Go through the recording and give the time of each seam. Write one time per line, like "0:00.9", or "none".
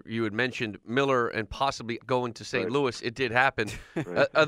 0:02.0